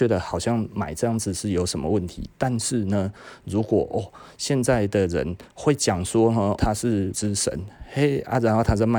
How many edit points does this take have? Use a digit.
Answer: 2